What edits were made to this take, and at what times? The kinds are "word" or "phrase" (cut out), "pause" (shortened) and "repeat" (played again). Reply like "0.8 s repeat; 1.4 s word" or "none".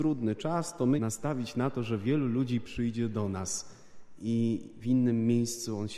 1.0 s phrase

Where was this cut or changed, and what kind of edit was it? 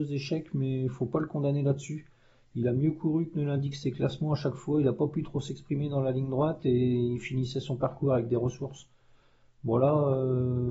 none

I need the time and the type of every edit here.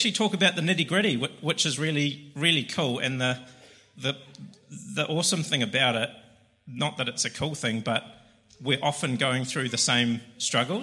none

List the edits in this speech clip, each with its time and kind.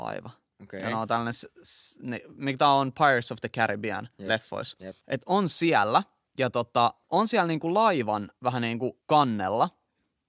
4.1 s pause; 5.0 s pause; 6.3 s pause; 7.0 s pause; 8.4 s pause; 9.0 s pause

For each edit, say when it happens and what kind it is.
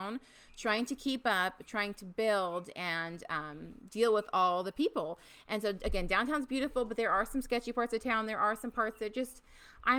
none

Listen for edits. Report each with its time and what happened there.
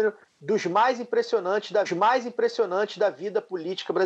1.9 s repeat

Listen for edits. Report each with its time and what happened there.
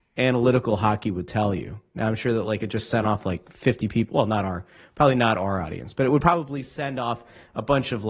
none

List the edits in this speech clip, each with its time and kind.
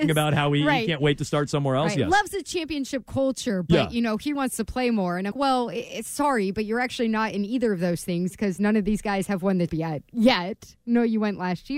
4.4 s word; 5.3 s word; 9.7 s word

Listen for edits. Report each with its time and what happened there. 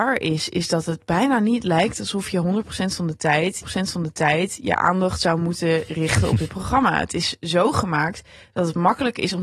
3.6 s repeat

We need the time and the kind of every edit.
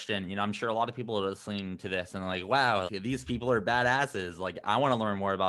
2.9 s word

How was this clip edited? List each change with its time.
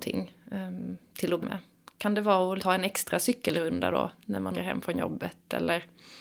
1.4 s word; 2.6 s word; 4.5 s word

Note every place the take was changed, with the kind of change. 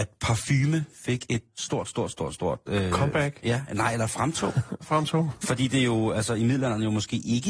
2.1 s word; 4.8 s word

